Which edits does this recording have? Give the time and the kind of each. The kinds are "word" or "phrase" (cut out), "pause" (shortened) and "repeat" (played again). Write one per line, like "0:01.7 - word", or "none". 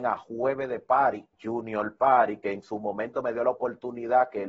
0:01.3 - pause